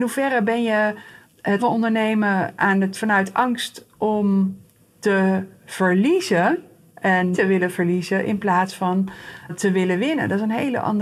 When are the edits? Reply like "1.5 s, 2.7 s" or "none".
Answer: 1.6 s, 2.9 s, 7.3 s, 9.5 s